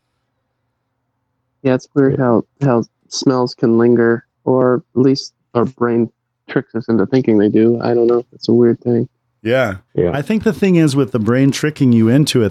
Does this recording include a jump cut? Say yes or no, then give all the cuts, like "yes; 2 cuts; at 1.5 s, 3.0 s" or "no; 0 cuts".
yes; 3 cuts; at 4.3 s, 5.4 s, 9.9 s